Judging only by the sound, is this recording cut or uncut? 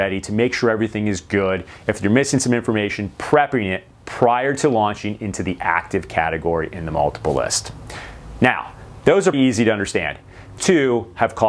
cut